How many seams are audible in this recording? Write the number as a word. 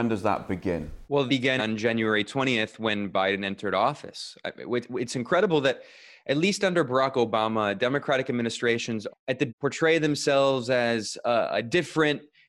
four